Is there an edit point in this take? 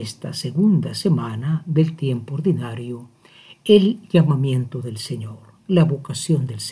no; 0 cuts

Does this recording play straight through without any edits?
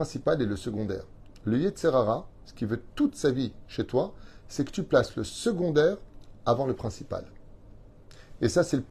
yes; 0 cuts

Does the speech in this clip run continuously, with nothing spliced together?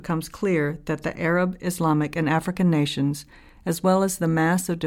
yes; 0 cuts

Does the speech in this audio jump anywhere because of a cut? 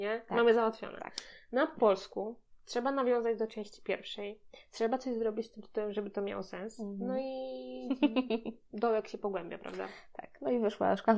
no; 0 cuts

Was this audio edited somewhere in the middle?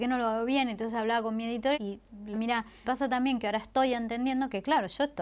yes; 3 cuts; at 1.7 s, 2.3 s, 2.8 s

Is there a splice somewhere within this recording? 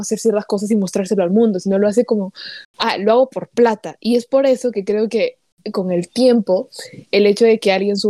no; 0 cuts

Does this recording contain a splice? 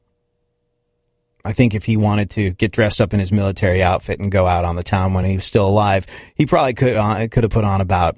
no; 0 cuts

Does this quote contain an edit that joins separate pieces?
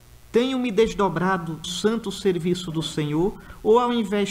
yes; 1 cut; at 1.6 s

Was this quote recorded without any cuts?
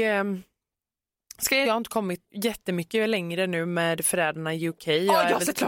no; 2 cuts; at 1.6 s, 2.2 s

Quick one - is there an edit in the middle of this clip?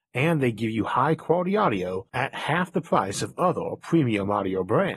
no; 0 cuts

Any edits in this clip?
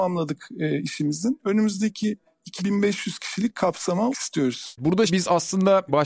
yes; 3 cuts; at 2.6 s, 4.1 s, 5.1 s

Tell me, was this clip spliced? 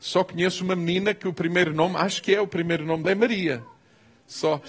yes; 1 cut; at 3.0 s

